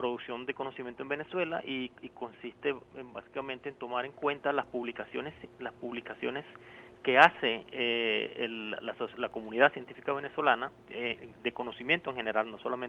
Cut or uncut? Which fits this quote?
uncut